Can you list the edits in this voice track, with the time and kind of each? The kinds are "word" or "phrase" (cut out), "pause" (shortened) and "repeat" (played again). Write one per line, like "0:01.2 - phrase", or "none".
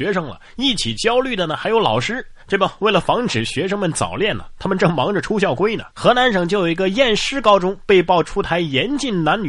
0:02.4 - pause
0:05.9 - pause